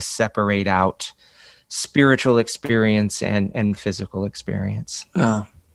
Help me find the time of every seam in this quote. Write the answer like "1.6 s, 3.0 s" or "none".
none